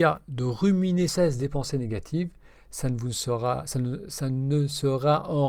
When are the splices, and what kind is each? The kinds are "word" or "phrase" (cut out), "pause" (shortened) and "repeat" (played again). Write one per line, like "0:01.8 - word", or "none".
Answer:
0:01.1 - word